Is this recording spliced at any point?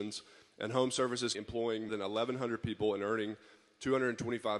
yes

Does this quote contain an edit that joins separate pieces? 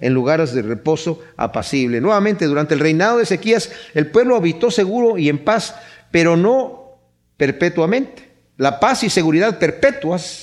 no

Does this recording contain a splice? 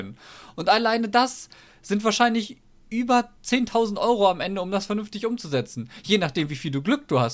yes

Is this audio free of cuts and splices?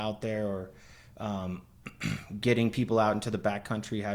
yes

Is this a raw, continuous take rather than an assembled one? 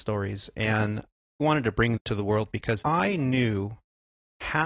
no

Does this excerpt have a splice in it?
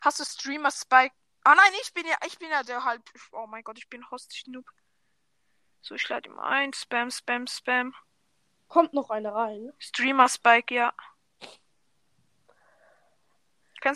no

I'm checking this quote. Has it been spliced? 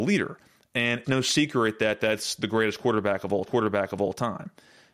yes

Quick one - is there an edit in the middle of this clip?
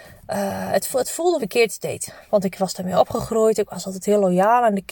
yes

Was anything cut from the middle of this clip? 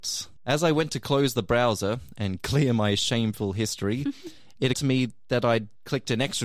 yes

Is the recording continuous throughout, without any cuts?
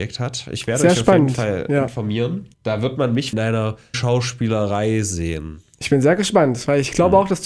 no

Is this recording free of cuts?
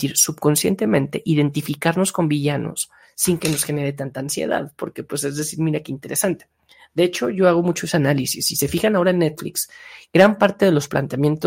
yes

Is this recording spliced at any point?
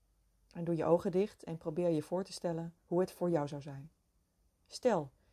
yes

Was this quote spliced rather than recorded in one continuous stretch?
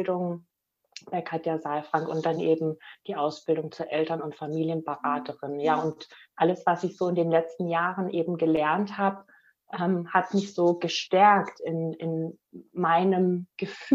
no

